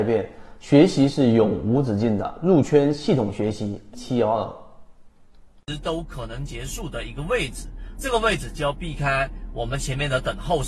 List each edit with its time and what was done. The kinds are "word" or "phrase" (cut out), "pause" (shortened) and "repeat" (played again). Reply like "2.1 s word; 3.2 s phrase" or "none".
3.9 s word